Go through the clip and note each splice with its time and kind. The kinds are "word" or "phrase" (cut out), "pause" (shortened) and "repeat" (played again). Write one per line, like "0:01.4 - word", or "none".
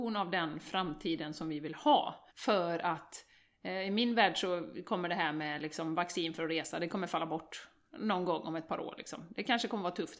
0:02.3 - pause